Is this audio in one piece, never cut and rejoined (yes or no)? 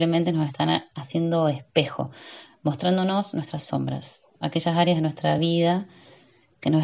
yes